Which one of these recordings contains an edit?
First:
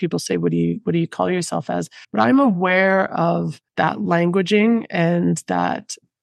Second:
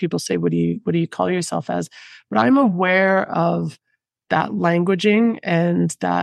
first; 2 cuts; at 2.0 s, 3.7 s

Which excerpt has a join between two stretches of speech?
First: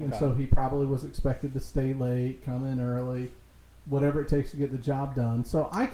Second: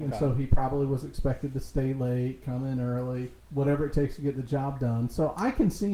second; 1 cut; at 3.4 s

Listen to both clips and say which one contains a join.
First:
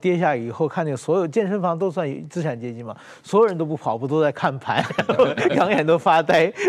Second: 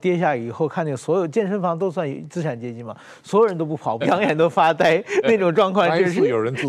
second; 1 cut; at 4.0 s

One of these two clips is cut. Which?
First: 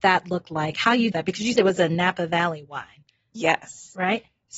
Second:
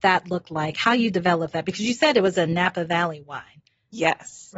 first; 2 cuts; at 1.1 s, 1.6 s

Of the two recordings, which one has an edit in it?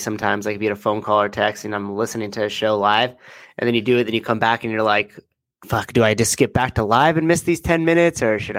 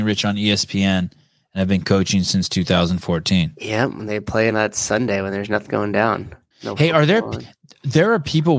second; 3 cuts; at 4.5 s, 5.7 s, 6.5 s

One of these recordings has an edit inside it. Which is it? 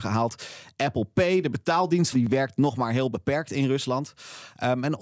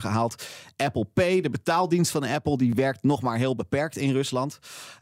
first; 1 cut; at 2.1 s

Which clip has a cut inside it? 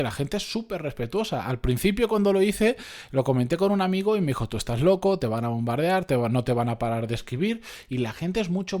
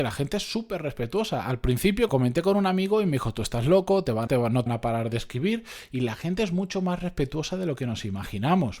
second; 3 cuts; at 2.1 s, 4.3 s, 4.7 s

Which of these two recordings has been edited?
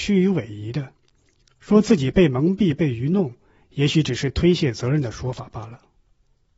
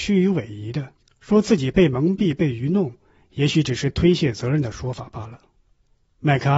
second; 1 cut; at 1.0 s

